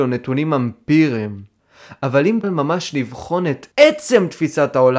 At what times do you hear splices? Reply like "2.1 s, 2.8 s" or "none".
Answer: 2.4 s, 3.7 s